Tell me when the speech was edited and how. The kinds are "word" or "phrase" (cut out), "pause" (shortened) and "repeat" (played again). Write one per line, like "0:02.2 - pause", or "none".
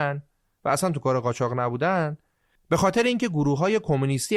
none